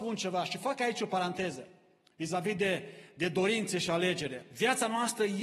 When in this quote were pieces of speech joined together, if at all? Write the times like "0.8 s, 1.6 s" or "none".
none